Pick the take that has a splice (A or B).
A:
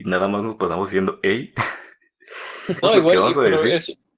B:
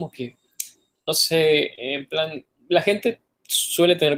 A